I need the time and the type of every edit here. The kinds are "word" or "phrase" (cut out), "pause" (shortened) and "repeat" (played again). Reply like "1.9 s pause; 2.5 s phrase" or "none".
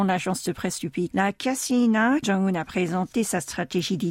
1.1 s word; 2.2 s word